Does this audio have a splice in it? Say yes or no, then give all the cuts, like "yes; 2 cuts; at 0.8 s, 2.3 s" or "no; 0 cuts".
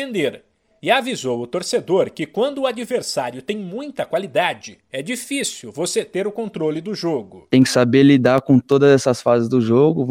yes; 1 cut; at 4.8 s